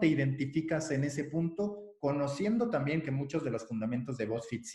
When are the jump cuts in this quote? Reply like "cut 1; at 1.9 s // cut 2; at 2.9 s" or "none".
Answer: none